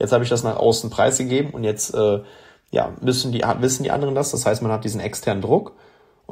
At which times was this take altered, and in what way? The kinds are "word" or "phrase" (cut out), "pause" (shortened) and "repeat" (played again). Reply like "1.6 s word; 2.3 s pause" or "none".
none